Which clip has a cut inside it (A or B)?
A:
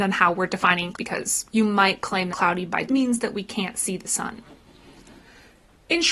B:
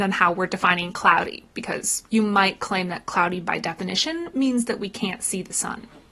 A